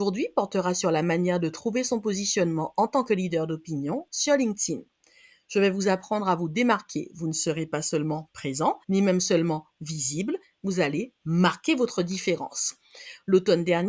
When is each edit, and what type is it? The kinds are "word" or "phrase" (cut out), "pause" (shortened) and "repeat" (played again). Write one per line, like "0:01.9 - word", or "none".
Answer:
0:08.8 - pause